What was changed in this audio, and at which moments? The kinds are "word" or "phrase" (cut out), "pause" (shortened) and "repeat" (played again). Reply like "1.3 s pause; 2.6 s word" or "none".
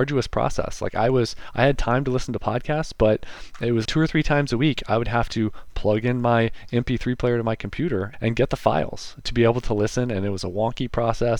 3.8 s word; 8.1 s word